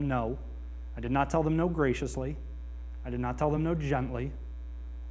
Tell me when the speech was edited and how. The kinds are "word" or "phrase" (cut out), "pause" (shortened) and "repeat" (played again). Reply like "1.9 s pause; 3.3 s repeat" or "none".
none